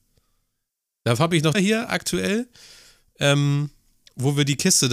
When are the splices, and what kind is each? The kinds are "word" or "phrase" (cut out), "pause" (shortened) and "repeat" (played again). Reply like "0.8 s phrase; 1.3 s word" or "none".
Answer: 1.5 s phrase